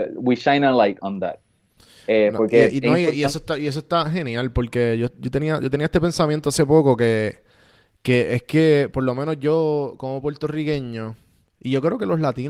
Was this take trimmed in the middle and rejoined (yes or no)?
no